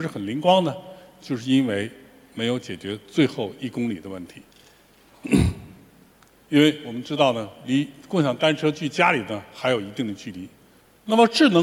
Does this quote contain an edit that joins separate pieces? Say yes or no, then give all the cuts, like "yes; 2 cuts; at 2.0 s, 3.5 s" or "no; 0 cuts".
no; 0 cuts